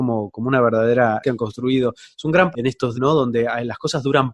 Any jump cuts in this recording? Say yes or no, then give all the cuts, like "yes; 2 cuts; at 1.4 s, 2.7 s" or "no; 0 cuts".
yes; 3 cuts; at 1.2 s, 2.5 s, 2.9 s